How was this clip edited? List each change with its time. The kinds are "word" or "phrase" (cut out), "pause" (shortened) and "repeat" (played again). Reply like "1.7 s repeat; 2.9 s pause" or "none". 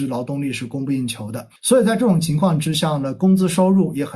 1.6 s pause